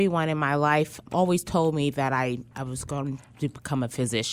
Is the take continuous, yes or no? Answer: no